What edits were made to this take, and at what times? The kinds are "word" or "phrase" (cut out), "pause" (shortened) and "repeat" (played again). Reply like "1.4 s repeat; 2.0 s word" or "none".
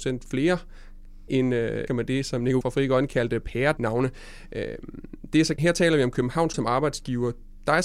1.3 s word; 1.9 s word; 2.6 s word; 3.8 s word; 5.6 s word; 6.5 s word